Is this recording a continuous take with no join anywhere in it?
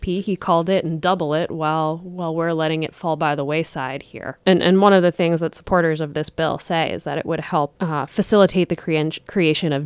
yes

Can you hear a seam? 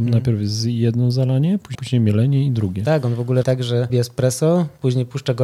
yes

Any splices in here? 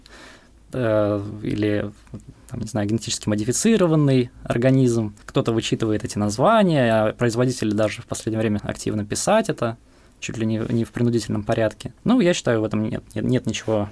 yes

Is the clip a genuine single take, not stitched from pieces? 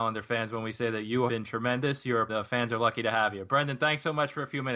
no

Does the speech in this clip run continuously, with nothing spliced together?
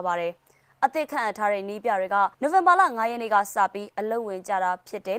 no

